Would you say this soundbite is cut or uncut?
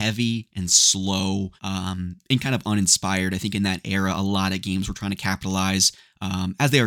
cut